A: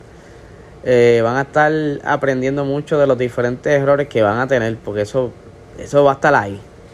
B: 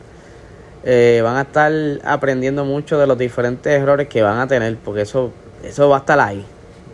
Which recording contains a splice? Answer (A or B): B